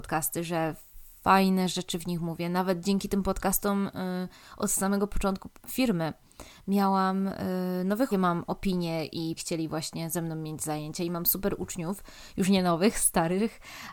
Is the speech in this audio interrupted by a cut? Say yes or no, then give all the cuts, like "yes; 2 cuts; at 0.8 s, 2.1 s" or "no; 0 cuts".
yes; 3 cuts; at 5.6 s, 8.1 s, 9.4 s